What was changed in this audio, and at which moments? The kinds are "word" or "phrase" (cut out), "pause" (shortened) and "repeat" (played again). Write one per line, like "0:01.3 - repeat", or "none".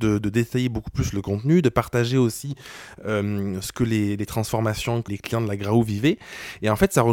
0:05.1 - word